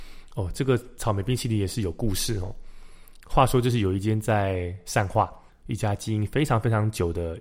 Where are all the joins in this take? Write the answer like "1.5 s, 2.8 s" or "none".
5.5 s